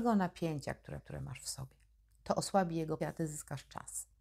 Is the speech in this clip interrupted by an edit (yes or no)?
yes